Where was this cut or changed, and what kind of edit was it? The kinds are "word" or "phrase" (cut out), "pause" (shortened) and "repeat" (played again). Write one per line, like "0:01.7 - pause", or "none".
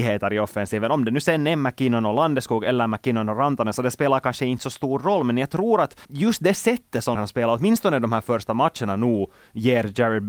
0:06.0 - pause
0:07.1 - word